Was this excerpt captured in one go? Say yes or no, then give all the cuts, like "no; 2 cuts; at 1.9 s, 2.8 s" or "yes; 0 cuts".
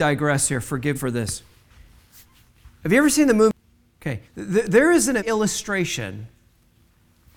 no; 3 cuts; at 0.9 s, 4.2 s, 5.2 s